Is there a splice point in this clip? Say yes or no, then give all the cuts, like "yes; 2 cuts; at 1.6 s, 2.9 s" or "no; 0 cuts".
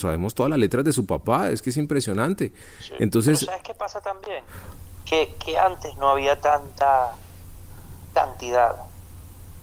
yes; 1 cut; at 2.6 s